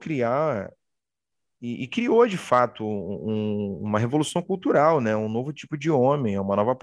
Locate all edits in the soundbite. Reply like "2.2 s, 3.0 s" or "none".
none